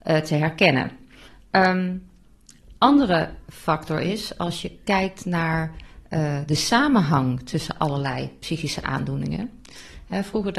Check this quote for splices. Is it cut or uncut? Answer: uncut